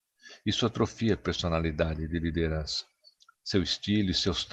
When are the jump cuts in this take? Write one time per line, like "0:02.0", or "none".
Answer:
none